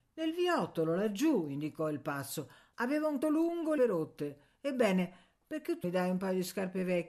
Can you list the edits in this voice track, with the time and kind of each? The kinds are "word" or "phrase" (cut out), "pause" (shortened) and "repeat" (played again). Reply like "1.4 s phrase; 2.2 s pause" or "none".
3.2 s word; 3.8 s phrase; 5.8 s word